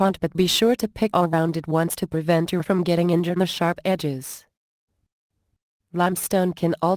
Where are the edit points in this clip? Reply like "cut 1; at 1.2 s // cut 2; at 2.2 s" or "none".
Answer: cut 1; at 1.1 s // cut 2; at 2.6 s // cut 3; at 3.4 s

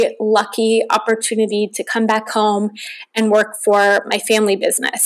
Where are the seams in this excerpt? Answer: none

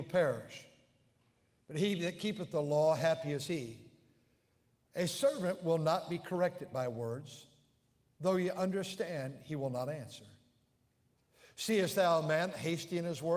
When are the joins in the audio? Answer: none

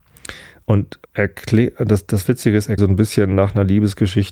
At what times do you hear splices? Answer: cut 1; at 1.0 s // cut 2; at 2.8 s

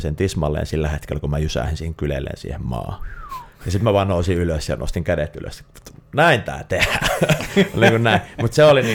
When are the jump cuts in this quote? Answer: none

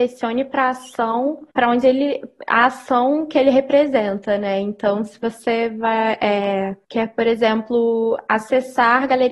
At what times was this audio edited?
cut 1; at 1.5 s // cut 2; at 6.8 s

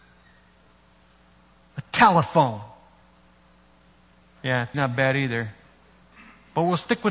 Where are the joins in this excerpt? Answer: cut 1; at 4.7 s

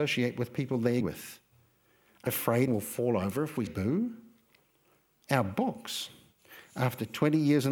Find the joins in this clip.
cut 1; at 1.0 s // cut 2; at 2.3 s // cut 3; at 2.7 s // cut 4; at 3.7 s

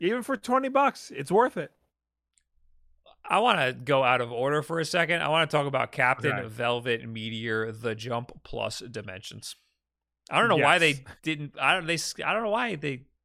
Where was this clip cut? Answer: none

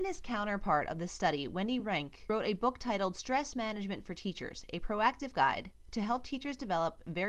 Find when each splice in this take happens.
none

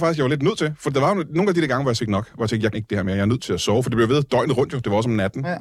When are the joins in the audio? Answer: cut 1; at 2.0 s // cut 2; at 2.7 s

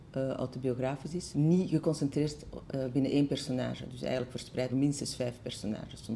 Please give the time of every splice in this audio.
cut 1; at 1.3 s // cut 2; at 4.7 s

